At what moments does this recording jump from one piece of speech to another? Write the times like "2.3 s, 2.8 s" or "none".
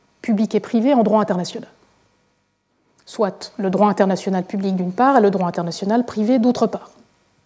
none